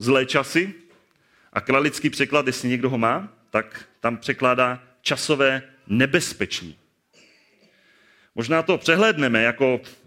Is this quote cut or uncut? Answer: uncut